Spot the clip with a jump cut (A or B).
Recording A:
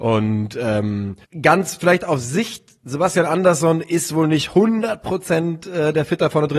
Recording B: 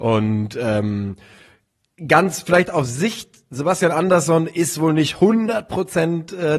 A